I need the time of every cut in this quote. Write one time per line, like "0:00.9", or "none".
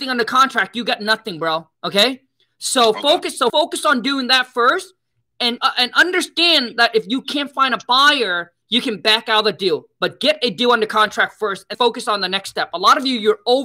0:01.7
0:03.5
0:05.6
0:08.6
0:11.7

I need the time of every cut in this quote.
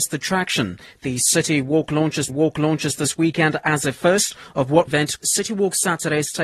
0:02.3
0:04.9
0:05.2

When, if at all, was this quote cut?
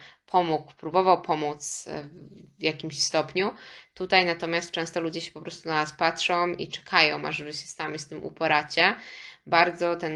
none

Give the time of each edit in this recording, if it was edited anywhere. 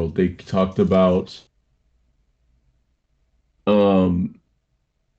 none

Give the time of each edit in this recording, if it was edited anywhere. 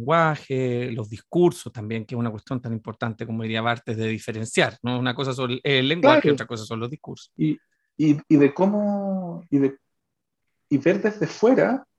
none

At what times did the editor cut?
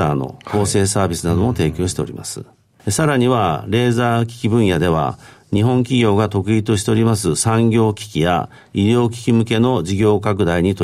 none

